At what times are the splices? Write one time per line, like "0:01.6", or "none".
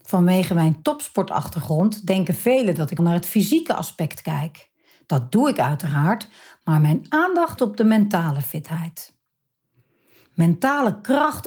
0:03.0
0:07.6

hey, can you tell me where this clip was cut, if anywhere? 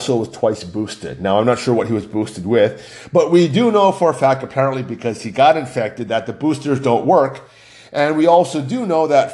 none

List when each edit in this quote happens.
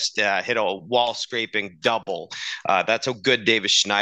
none

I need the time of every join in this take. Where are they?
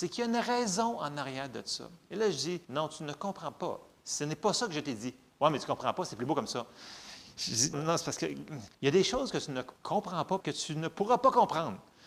0:02.0
0:02.6
0:07.7
0:08.7
0:09.8
0:10.4

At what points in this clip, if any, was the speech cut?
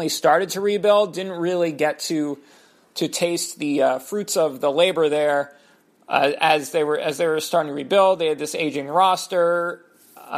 none

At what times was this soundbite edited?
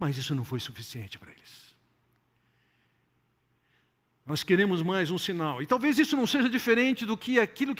none

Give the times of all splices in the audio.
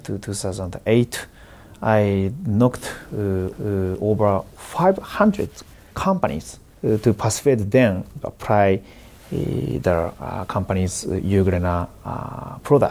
0:03.5
0:06.7
0:08.2

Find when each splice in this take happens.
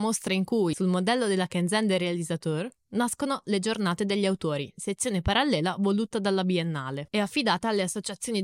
none

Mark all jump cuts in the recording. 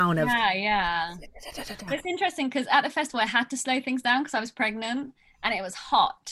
none

